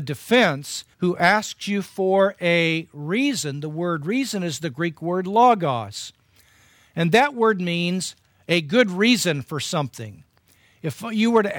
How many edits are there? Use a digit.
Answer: 1